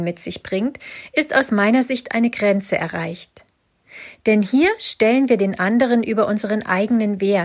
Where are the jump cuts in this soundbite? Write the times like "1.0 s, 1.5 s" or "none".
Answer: none